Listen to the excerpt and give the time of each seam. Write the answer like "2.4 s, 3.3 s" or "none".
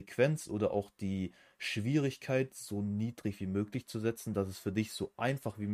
none